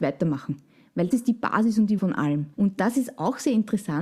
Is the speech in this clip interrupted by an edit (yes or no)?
yes